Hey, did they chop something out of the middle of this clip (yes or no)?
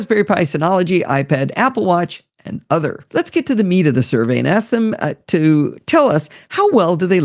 yes